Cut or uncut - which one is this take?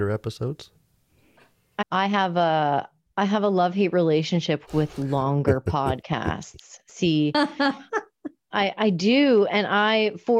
cut